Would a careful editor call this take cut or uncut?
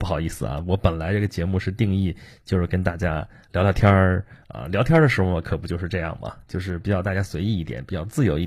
uncut